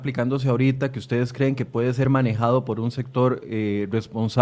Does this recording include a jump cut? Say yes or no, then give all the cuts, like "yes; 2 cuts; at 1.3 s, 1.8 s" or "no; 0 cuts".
no; 0 cuts